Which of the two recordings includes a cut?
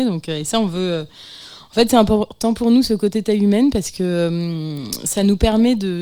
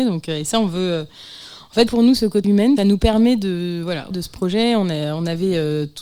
second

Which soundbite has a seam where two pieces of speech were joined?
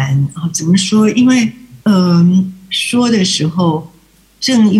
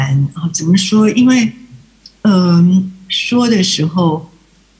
first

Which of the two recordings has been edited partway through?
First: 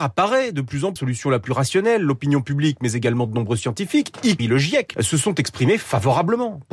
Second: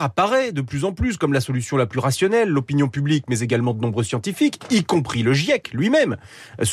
first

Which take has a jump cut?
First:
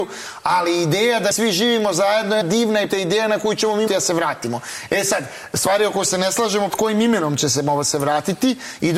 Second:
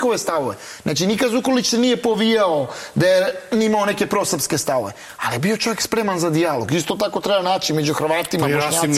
first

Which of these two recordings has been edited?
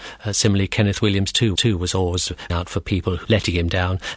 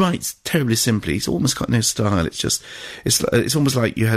first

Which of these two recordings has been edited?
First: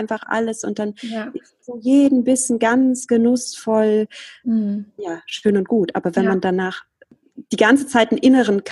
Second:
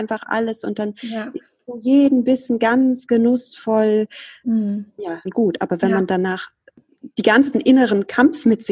second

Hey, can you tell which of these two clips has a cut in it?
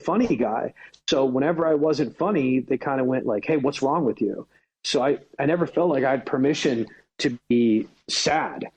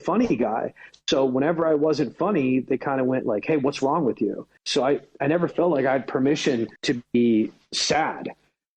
second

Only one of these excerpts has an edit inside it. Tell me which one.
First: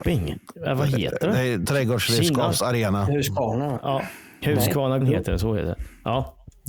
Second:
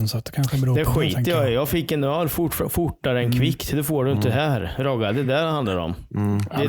first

